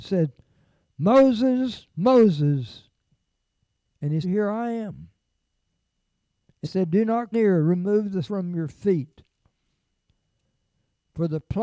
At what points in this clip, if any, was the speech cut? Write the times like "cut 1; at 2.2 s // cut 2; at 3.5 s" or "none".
cut 1; at 4.2 s // cut 2; at 6.6 s // cut 3; at 7.3 s // cut 4; at 8.2 s

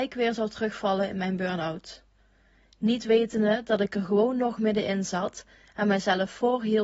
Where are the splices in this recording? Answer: none

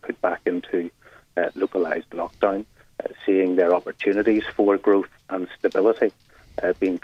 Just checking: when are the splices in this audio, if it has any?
none

